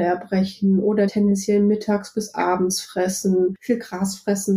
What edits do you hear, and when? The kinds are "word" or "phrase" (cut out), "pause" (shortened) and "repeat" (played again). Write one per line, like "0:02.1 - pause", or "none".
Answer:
0:01.1 - word